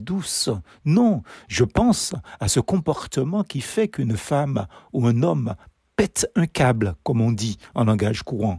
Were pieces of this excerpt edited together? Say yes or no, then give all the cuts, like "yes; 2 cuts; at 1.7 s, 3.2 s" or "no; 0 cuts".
no; 0 cuts